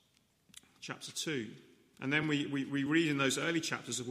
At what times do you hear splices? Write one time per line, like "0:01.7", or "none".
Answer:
none